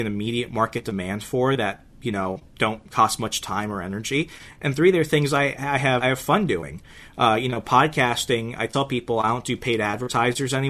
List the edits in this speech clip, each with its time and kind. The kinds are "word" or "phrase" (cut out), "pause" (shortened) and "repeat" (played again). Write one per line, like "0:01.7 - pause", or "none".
0:02.5 - pause
0:06.0 - word